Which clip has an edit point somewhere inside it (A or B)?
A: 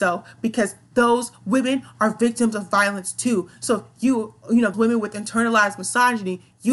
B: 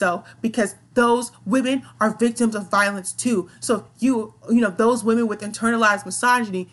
A